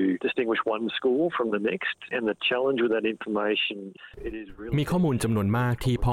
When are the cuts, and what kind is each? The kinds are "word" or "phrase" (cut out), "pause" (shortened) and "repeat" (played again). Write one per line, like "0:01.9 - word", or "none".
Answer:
none